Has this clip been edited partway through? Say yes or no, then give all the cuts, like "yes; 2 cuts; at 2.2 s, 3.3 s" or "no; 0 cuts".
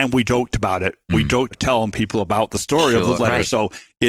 yes; 3 cuts; at 1.1 s, 1.5 s, 3.1 s